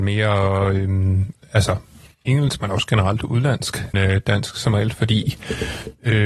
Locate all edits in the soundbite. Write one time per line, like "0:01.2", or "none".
0:03.9